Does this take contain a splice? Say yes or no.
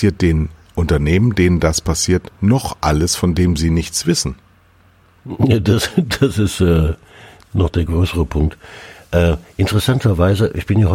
no